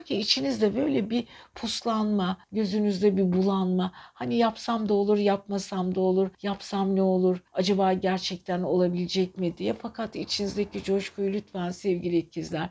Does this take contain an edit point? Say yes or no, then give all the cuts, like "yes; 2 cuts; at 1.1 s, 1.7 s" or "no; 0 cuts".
yes; 3 cuts; at 2.4 s, 6.3 s, 7.5 s